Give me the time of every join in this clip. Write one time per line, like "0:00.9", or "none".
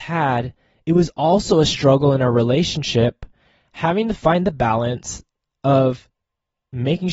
none